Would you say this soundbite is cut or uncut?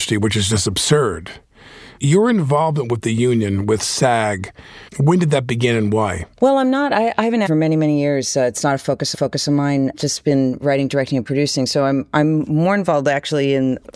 cut